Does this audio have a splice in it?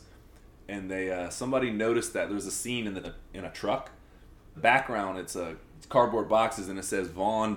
yes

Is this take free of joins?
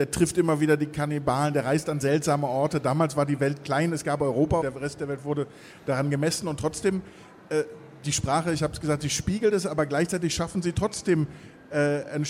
no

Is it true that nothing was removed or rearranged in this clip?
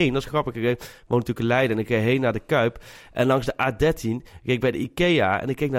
yes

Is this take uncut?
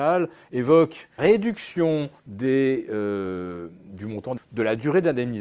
no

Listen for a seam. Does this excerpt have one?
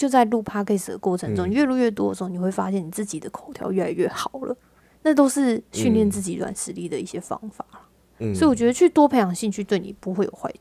no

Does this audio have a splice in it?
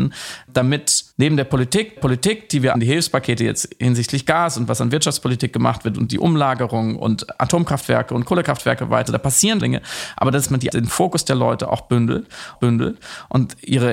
yes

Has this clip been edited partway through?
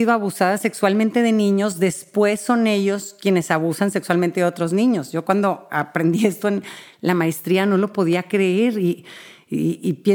no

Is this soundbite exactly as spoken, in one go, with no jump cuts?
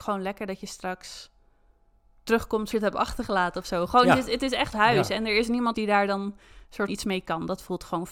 no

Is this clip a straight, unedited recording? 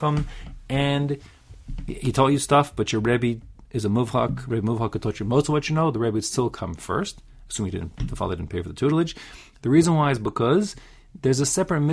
yes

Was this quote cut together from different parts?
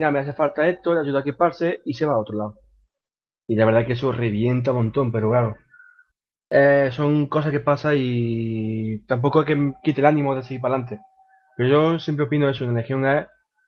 no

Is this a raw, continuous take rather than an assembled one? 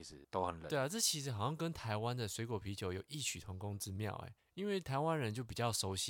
no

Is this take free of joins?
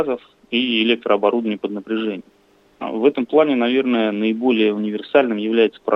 yes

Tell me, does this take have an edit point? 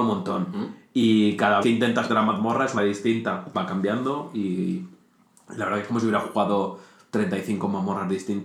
yes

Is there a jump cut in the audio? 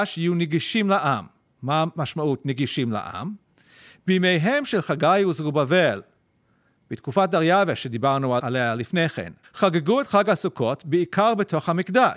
yes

